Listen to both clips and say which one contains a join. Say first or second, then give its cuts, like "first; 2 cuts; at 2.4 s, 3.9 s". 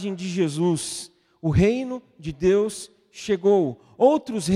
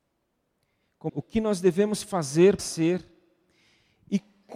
second; 2 cuts; at 1.1 s, 2.6 s